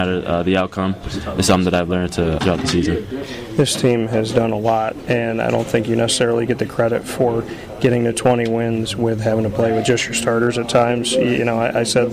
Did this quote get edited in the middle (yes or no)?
yes